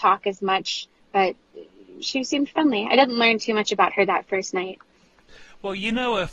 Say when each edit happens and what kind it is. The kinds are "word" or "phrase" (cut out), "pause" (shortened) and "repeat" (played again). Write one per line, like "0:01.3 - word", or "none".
0:02.0 - word